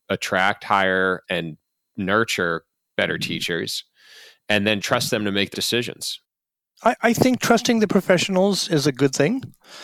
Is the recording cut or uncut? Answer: cut